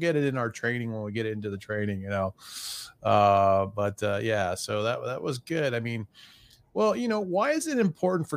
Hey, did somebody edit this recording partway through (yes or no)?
no